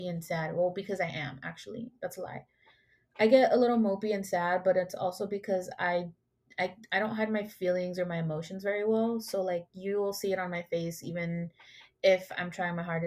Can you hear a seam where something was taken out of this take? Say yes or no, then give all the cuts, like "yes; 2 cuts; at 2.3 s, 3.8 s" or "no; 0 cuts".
no; 0 cuts